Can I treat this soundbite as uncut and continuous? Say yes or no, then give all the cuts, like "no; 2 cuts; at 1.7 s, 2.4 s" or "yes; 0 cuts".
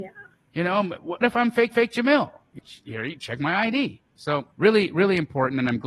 no; 4 cuts; at 1.2 s, 1.7 s, 2.6 s, 4.5 s